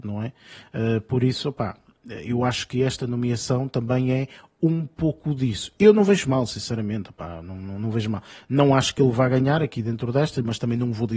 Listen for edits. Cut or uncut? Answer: uncut